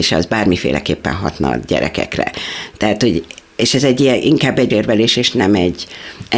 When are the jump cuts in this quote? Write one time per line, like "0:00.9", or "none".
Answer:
0:04.7